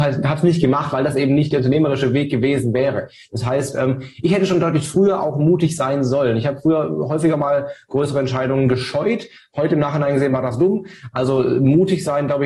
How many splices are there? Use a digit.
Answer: 0